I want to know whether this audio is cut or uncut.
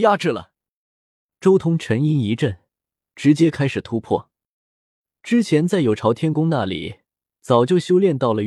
uncut